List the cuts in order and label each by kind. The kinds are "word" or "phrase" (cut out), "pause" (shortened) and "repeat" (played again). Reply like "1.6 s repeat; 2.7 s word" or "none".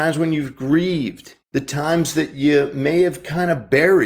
1.4 s pause